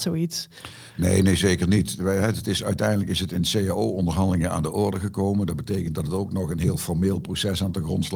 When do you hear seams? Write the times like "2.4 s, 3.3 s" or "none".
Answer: none

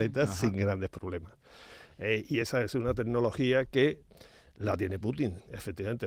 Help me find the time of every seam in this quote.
none

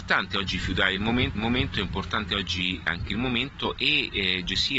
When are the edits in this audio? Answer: 1.4 s, 2.9 s

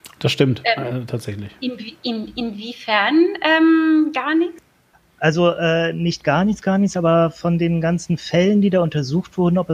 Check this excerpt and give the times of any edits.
4.9 s

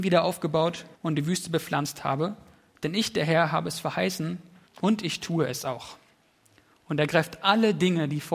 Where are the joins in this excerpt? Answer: 0.9 s, 4.7 s

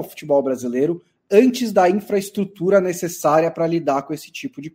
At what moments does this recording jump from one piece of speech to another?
none

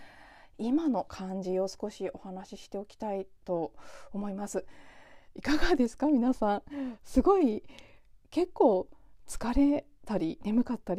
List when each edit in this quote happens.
8.2 s

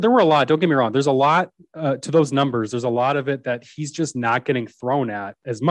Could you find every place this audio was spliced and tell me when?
none

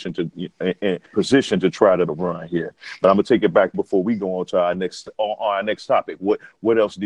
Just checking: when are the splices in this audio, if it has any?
1.1 s, 2.1 s, 3.7 s, 5.1 s

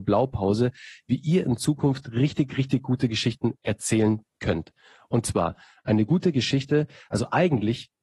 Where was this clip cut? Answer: none

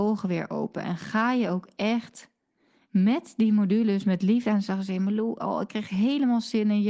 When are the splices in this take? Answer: none

